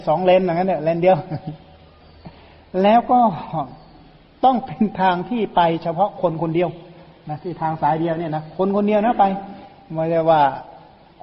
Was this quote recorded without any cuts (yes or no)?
yes